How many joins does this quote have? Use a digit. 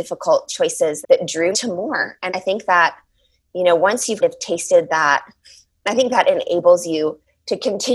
4